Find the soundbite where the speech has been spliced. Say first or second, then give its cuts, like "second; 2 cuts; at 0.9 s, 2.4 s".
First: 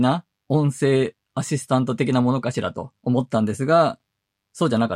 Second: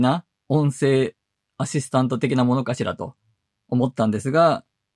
first; 2 cuts; at 1.2 s, 3.0 s